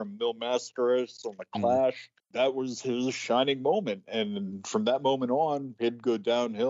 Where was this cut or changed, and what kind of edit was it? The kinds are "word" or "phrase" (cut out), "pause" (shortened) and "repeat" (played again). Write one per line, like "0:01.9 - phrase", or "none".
0:02.2 - pause